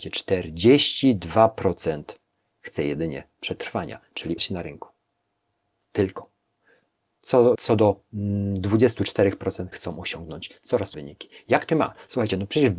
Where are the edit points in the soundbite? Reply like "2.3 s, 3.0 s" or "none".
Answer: 2.6 s, 4.4 s, 7.5 s, 9.7 s, 10.9 s, 11.7 s